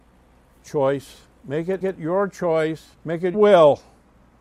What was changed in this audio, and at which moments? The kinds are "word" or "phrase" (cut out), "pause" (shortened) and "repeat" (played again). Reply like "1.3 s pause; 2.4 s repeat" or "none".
1.8 s repeat; 2.9 s pause; 3.3 s word